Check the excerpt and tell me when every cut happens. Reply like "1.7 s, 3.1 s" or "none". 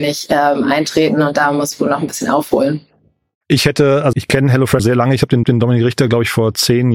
1.7 s, 4.1 s, 4.8 s, 5.4 s